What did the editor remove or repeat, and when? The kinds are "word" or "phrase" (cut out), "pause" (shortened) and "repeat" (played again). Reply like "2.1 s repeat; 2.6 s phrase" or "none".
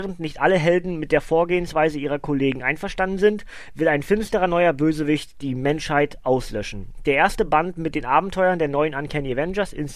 none

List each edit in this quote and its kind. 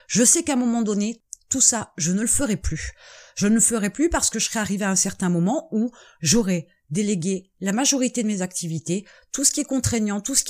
none

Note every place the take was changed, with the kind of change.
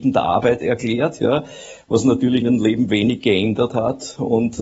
2.4 s word

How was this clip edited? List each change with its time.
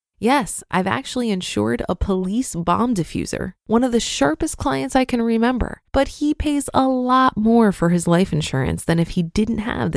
3.6 s pause; 5.9 s pause

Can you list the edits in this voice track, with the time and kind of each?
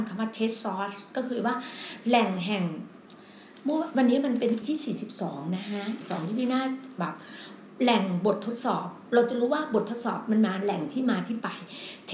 4.6 s word; 6.0 s word

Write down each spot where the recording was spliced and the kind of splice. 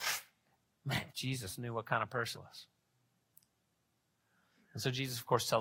1.1 s pause; 2.3 s word

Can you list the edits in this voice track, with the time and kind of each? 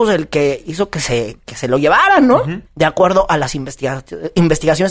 2.7 s pause

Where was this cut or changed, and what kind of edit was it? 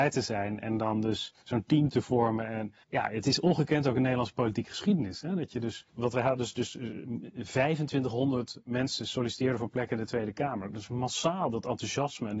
1.4 s pause; 2.8 s pause; 5.9 s pause

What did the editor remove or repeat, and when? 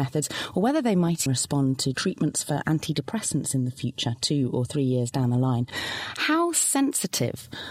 1.3 s word; 1.9 s word

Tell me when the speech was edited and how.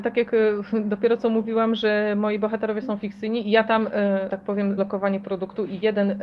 4.3 s word; 4.8 s word

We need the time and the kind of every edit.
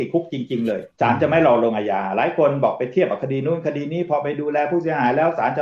0.9 s pause

